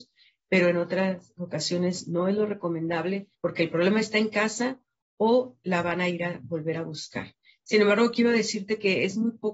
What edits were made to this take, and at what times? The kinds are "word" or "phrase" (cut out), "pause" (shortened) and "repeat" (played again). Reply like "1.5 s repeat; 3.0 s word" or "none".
3.3 s pause